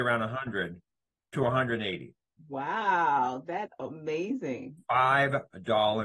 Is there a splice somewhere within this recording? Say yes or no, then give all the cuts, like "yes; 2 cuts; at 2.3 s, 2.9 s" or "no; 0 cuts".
yes; 2 cuts; at 2.2 s, 3.7 s